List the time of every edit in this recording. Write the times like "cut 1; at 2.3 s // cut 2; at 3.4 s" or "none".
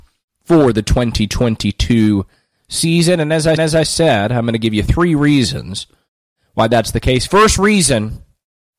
cut 1; at 3.6 s